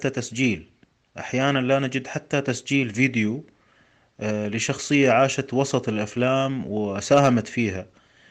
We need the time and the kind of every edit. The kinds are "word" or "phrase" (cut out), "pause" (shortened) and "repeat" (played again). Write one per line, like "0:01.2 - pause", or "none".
none